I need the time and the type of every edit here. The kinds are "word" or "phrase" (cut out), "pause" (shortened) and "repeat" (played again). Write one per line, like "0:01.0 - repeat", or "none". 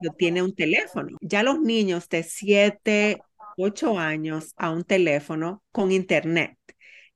0:04.6 - phrase